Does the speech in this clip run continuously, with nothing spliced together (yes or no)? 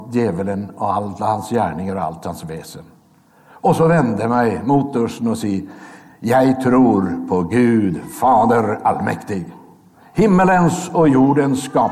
yes